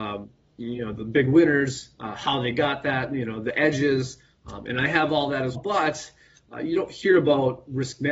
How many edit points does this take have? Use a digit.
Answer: 1